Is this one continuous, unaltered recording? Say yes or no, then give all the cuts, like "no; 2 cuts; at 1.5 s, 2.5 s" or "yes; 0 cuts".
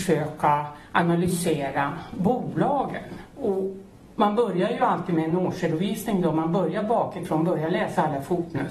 yes; 0 cuts